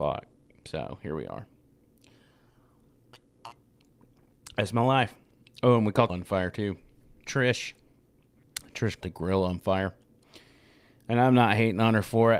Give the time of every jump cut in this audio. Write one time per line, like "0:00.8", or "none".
0:06.1
0:09.0